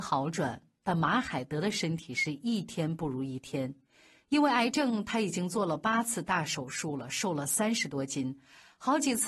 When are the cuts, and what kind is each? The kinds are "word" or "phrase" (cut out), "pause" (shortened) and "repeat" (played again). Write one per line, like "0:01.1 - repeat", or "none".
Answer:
none